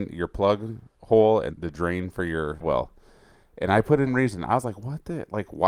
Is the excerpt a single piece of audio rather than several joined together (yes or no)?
no